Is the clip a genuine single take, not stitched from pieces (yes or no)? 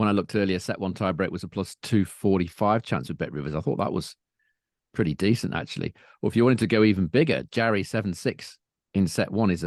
yes